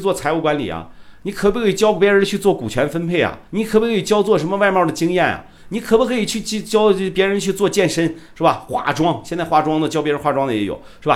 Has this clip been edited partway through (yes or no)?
yes